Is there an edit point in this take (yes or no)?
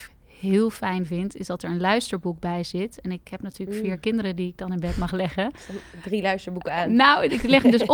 no